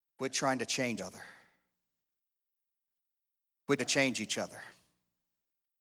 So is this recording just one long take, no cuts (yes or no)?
no